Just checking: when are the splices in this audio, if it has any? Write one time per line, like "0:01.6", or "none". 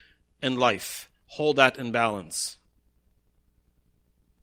none